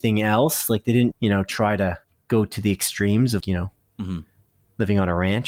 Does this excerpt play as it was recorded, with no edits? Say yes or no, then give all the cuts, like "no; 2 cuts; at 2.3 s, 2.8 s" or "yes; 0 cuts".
no; 3 cuts; at 1.1 s, 2.0 s, 3.4 s